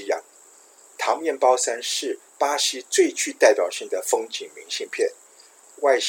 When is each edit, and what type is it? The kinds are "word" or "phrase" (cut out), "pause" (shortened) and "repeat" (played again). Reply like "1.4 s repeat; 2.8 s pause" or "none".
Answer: 2.3 s pause